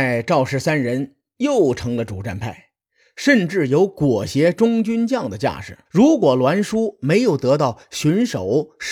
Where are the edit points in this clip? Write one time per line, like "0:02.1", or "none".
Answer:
0:05.9